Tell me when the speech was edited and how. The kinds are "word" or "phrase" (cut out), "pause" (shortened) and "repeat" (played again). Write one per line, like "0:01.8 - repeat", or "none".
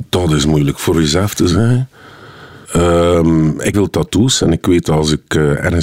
0:00.9 - word
0:02.6 - pause
0:03.7 - phrase